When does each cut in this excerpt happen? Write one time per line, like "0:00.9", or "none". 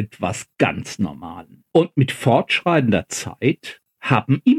0:01.7